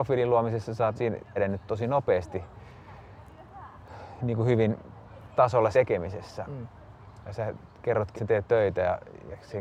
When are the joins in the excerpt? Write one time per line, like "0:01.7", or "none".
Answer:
0:01.0
0:01.4
0:05.3
0:05.7
0:08.2
0:08.5